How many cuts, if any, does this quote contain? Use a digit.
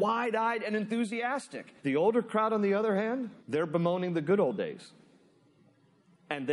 2